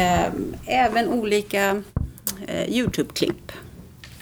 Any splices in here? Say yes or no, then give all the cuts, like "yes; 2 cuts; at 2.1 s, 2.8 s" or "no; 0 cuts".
no; 0 cuts